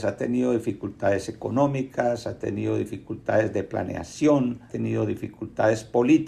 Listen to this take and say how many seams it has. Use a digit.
1